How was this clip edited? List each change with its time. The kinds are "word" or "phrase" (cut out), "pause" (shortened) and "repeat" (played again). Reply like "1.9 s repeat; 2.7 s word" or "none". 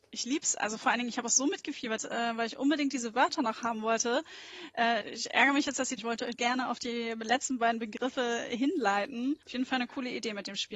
2.0 s phrase; 5.0 s word; 6.0 s phrase; 6.3 s phrase; 9.4 s pause